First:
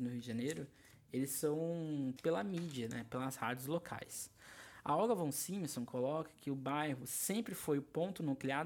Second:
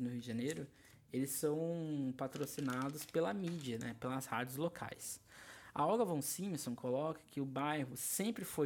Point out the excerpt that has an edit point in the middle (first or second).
first